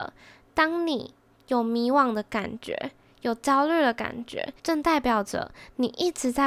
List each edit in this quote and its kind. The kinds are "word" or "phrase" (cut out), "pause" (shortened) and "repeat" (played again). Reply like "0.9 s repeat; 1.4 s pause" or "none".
4.6 s pause

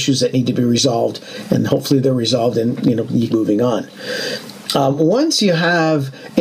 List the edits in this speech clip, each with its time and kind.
3.3 s word

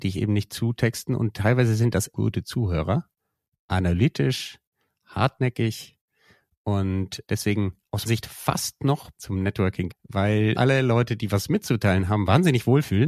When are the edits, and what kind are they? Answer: 2.1 s word; 7.3 s word; 8.0 s word; 9.1 s word; 9.9 s word; 10.5 s word

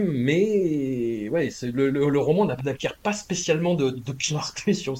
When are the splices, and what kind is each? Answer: 1.9 s word; 2.6 s phrase

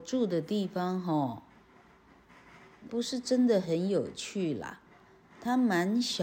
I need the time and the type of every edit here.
2.9 s word

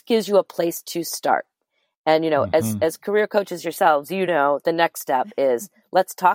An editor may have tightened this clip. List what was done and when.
none

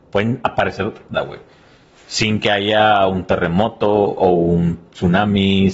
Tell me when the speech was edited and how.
1.1 s phrase

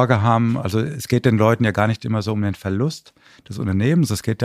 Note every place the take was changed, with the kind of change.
none

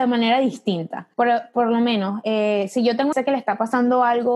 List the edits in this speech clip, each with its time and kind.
1.1 s pause; 3.1 s phrase

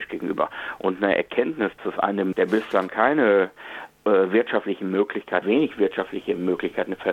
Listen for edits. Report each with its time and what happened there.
1.8 s word; 2.3 s word; 2.9 s word; 5.4 s word

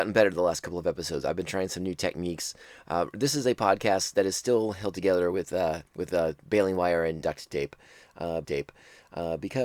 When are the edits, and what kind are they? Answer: 5.9 s pause; 7.2 s word; 8.4 s repeat

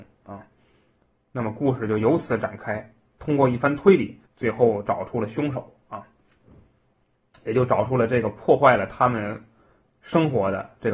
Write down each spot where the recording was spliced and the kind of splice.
4.3 s pause

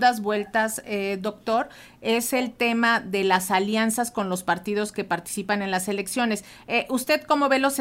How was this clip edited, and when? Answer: none

